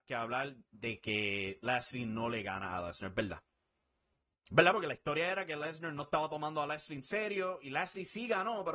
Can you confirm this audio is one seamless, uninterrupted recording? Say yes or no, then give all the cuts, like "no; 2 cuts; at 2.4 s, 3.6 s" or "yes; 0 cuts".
yes; 0 cuts